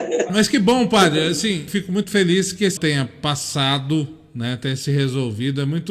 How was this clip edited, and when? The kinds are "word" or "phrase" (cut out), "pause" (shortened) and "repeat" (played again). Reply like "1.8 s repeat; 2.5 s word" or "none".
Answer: 1.7 s word; 2.8 s word